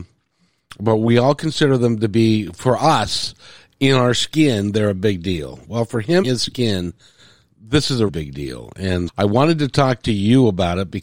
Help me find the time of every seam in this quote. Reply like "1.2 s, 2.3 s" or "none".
6.2 s, 8.1 s, 9.1 s